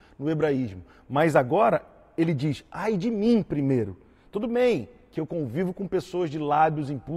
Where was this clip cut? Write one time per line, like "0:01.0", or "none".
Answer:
none